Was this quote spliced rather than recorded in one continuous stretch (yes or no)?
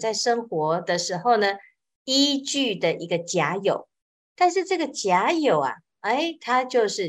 no